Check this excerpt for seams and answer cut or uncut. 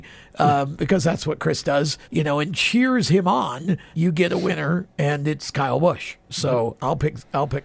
cut